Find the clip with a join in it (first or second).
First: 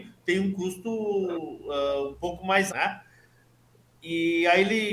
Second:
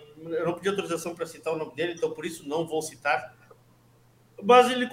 first